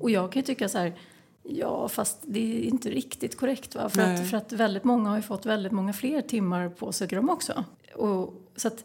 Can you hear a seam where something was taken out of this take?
yes; 1 cut; at 7.1 s

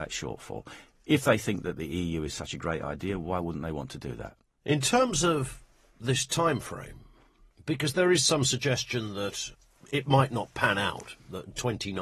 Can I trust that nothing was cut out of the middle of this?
yes; 0 cuts

